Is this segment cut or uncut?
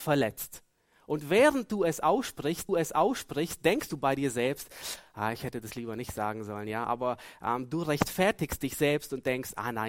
cut